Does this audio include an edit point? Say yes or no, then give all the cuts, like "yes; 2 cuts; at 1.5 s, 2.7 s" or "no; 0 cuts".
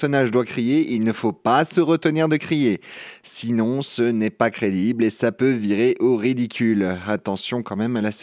no; 0 cuts